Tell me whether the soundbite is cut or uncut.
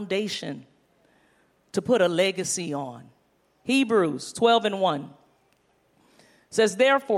uncut